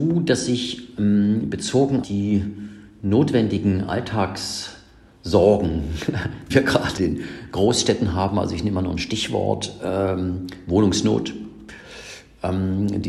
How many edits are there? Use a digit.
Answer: 3